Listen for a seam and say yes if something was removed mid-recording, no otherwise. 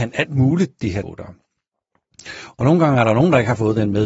yes